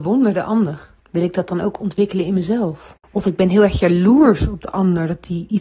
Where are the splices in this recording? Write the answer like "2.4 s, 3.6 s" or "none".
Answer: 1.0 s, 3.0 s